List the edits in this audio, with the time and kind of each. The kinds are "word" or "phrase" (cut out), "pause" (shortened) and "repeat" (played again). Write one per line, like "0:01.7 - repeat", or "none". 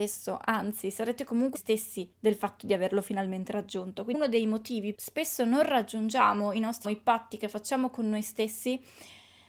0:01.5 - phrase
0:02.1 - pause
0:04.9 - phrase
0:06.8 - phrase